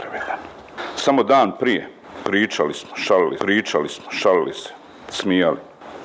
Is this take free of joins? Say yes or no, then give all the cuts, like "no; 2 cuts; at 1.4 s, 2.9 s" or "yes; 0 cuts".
no; 1 cut; at 3.4 s